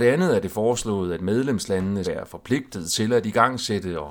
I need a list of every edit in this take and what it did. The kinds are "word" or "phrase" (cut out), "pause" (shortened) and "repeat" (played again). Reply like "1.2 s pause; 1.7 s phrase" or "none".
2.0 s word